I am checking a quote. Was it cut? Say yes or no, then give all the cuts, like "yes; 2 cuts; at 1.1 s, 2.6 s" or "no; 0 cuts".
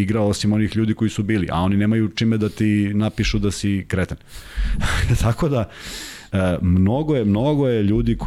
no; 0 cuts